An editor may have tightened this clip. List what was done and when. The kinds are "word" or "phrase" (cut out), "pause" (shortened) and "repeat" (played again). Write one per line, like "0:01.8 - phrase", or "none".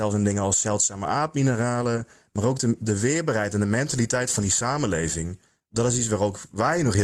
none